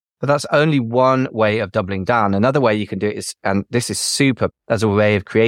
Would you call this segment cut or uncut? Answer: cut